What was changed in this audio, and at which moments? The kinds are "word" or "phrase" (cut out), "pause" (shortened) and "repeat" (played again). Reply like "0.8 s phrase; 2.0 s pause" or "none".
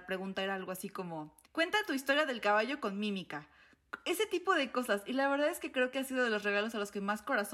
1.4 s pause